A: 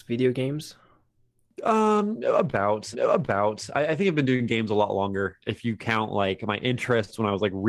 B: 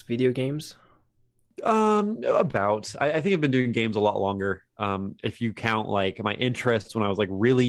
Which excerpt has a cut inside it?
A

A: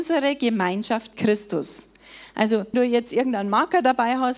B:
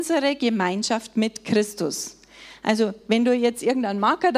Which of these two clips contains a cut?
A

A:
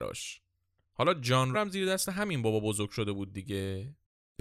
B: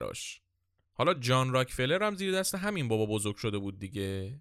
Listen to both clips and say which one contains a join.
A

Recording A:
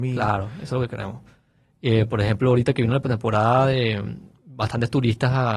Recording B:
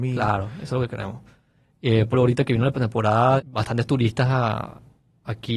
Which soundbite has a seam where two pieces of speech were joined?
B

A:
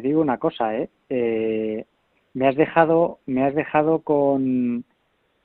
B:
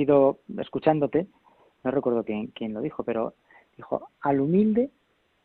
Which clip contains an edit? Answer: A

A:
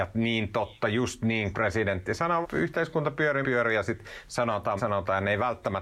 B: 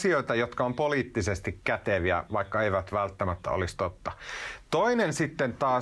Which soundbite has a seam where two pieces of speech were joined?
A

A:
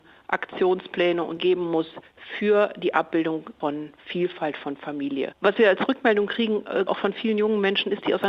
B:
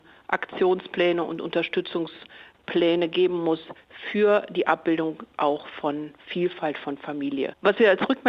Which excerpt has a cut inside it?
A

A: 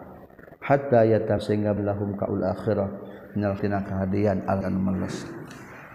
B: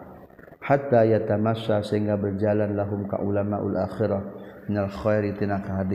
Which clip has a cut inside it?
A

